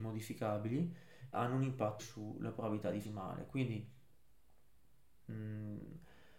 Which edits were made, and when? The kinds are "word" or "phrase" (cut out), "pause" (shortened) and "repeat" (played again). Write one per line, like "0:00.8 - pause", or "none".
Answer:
0:01.3 - word
0:02.0 - word
0:03.0 - word